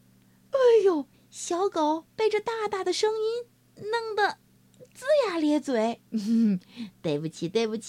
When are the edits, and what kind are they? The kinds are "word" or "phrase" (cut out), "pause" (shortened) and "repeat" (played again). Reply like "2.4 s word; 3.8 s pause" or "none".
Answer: 1.1 s pause; 2.1 s pause; 6.1 s pause